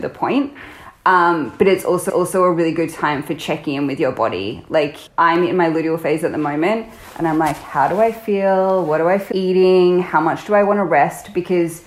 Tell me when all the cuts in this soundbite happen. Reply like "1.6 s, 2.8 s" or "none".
2.1 s, 5.1 s, 9.3 s